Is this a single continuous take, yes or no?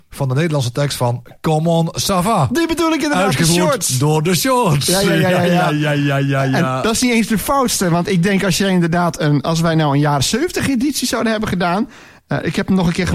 yes